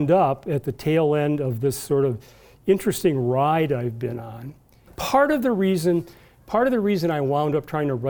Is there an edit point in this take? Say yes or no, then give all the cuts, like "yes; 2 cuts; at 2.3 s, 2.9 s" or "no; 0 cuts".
no; 0 cuts